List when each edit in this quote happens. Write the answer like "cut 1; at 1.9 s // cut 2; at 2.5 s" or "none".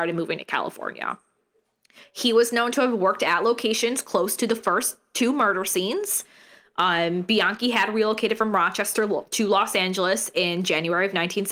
none